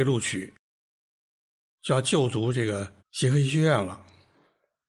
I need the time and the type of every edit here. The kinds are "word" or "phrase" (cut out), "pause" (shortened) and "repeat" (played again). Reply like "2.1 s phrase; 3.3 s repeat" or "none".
3.0 s pause